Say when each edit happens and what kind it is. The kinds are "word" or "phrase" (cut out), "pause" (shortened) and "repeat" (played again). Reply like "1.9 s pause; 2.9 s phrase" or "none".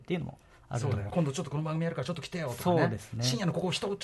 1.1 s word